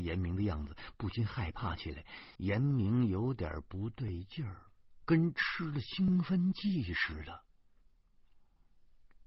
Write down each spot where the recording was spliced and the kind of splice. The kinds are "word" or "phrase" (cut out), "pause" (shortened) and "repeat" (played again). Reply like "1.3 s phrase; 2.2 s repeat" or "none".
2.4 s pause